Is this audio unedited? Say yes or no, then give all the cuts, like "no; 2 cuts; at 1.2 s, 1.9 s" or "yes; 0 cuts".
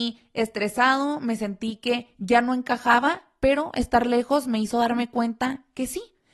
yes; 0 cuts